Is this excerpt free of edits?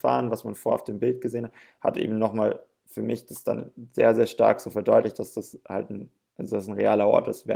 yes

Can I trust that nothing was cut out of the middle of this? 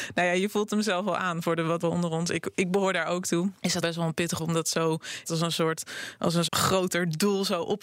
no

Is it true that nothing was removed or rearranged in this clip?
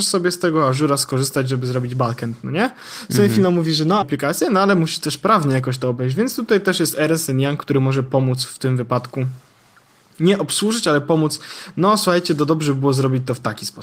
no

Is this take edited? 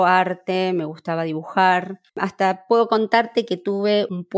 yes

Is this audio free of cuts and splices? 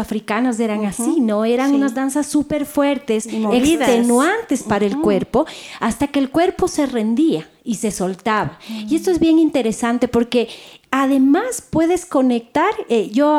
yes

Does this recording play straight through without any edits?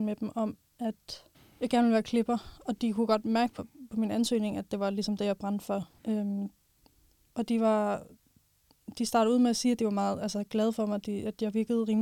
no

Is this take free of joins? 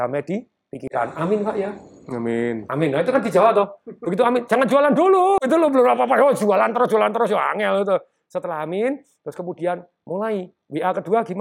yes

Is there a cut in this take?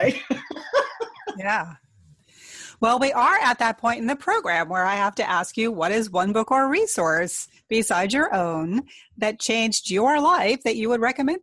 no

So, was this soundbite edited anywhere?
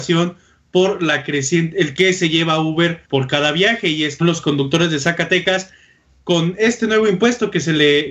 yes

